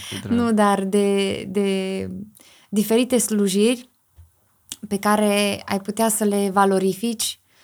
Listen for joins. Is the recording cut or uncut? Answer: uncut